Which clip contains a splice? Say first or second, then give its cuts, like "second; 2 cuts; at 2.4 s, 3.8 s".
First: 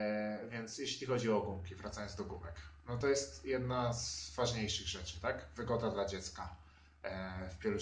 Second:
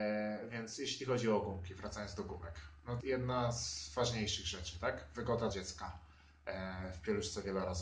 second; 2 cuts; at 3.0 s, 5.5 s